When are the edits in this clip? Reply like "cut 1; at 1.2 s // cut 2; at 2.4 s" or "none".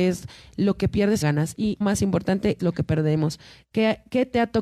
cut 1; at 1.2 s // cut 2; at 1.8 s // cut 3; at 2.6 s